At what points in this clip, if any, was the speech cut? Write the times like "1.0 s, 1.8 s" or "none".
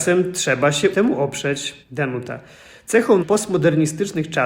0.9 s, 1.8 s, 3.2 s